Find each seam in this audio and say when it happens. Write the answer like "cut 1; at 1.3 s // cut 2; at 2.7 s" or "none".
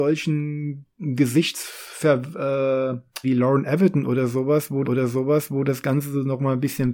cut 1; at 3.2 s // cut 2; at 4.8 s

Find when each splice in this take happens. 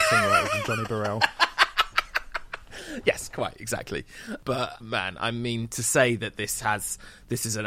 cut 1; at 4.8 s

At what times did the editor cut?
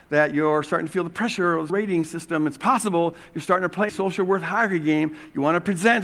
cut 1; at 1.7 s // cut 2; at 3.9 s

